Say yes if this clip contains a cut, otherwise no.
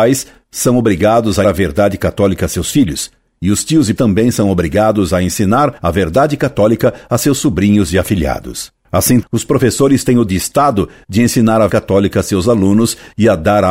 yes